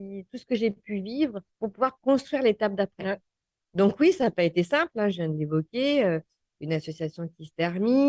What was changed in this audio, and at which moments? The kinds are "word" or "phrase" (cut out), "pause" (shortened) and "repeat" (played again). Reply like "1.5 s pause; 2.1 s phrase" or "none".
1.5 s pause